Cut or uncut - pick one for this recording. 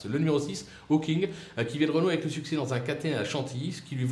uncut